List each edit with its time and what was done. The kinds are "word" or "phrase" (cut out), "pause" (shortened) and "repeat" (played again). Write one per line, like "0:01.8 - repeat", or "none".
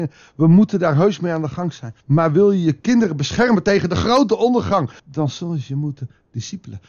0:02.0 - pause
0:05.0 - pause